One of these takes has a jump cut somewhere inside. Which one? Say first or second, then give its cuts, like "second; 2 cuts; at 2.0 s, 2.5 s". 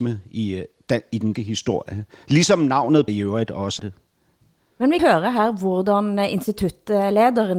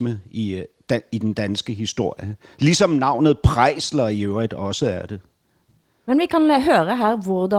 first; 4 cuts; at 1.3 s, 3.1 s, 3.8 s, 5.0 s